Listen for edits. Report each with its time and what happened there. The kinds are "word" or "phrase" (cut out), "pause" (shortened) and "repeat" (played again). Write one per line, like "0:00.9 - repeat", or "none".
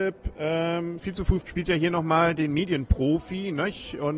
0:01.0 - phrase
0:01.4 - word